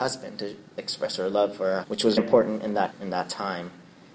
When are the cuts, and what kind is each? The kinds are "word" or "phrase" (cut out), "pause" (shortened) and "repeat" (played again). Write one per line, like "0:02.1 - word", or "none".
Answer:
0:01.8 - word
0:02.2 - word
0:02.9 - word